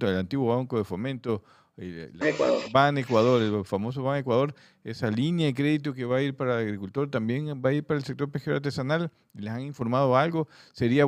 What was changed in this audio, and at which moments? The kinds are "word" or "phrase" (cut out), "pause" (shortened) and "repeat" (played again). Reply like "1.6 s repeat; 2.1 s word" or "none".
2.2 s word